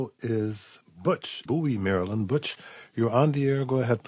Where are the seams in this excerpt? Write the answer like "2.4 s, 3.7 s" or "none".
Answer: 1.5 s